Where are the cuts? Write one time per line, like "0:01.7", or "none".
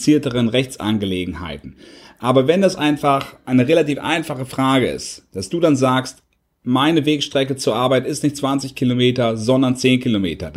none